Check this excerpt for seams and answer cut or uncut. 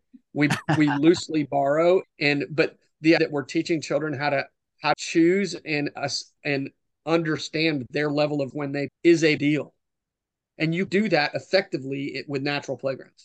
cut